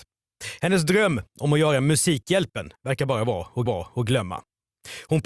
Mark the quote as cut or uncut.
cut